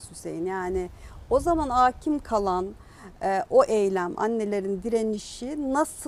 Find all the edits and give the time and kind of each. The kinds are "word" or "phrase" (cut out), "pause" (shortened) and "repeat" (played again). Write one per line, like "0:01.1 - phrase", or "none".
none